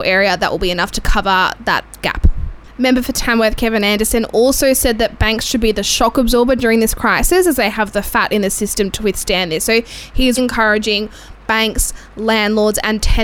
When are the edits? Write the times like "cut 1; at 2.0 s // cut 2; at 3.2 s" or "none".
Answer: cut 1; at 10.4 s